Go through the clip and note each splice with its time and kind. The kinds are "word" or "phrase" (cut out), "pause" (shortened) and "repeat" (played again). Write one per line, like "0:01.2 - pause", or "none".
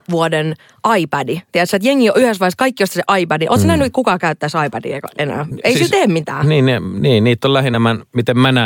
none